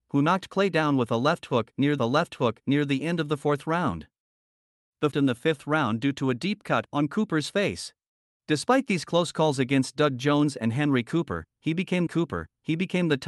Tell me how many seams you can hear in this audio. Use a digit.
4